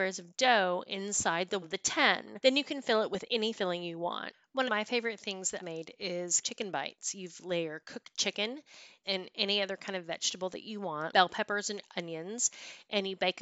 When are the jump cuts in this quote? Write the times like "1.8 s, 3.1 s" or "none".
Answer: 1.6 s, 3.5 s, 4.7 s, 5.6 s, 6.4 s, 9.0 s, 11.1 s